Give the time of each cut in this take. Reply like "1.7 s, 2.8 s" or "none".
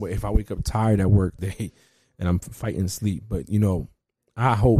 1.4 s